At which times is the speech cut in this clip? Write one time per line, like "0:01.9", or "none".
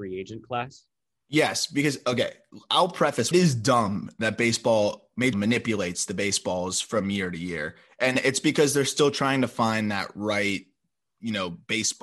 0:03.3
0:05.3